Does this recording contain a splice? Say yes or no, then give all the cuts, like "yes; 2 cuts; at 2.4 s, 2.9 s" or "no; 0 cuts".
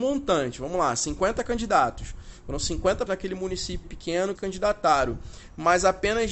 yes; 3 cuts; at 3.1 s, 3.8 s, 4.4 s